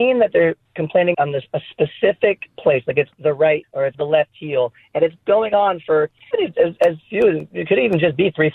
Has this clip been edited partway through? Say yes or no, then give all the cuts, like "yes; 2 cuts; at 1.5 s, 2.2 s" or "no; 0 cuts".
yes; 5 cuts; at 1.1 s, 3.1 s, 3.6 s, 3.9 s, 6.3 s